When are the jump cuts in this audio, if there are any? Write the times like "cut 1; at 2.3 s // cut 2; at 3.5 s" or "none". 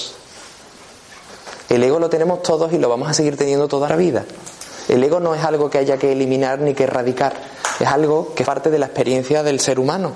cut 1; at 3.9 s // cut 2; at 8.4 s